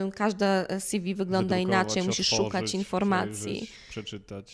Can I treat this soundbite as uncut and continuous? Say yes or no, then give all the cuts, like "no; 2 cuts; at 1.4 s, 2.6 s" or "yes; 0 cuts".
yes; 0 cuts